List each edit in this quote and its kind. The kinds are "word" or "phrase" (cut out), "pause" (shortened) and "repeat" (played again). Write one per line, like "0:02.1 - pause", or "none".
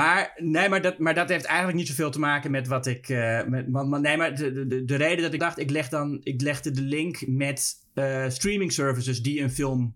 0:05.4 - word